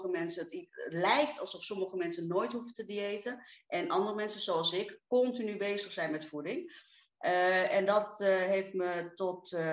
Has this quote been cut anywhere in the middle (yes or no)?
no